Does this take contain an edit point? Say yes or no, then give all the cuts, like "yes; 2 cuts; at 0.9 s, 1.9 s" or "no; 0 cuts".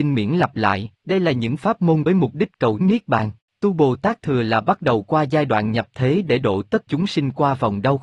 yes; 5 cuts; at 1.0 s, 2.1 s, 2.8 s, 3.4 s, 6.9 s